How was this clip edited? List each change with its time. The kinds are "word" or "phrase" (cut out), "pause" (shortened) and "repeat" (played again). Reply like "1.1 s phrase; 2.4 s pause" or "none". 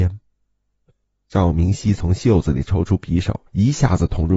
3.5 s pause